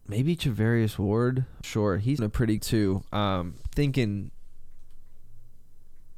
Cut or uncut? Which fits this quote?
cut